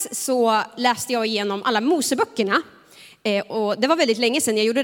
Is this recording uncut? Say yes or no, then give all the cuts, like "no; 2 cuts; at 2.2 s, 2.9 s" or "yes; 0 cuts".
yes; 0 cuts